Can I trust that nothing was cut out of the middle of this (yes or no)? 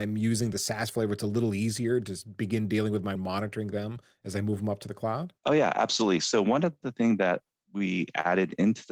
no